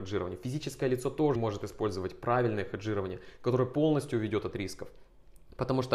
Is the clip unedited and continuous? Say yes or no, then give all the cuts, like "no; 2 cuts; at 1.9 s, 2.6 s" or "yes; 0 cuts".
no; 1 cut; at 1.4 s